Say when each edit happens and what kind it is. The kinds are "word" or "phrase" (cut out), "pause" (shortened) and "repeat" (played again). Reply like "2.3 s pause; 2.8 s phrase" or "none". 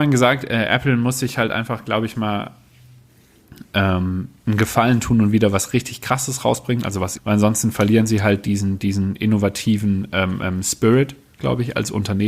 7.2 s phrase